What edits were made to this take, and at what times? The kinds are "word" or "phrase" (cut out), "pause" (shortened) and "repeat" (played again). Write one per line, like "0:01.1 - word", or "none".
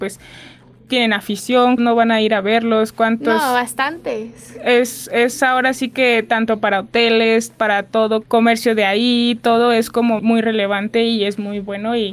0:01.8 - phrase
0:08.2 - word
0:10.2 - word